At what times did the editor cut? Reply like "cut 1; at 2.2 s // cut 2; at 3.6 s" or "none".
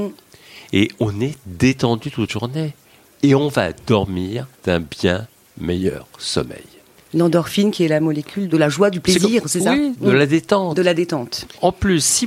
cut 1; at 2.3 s // cut 2; at 4.5 s